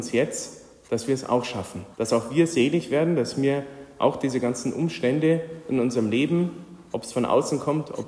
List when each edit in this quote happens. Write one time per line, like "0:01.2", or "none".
0:01.9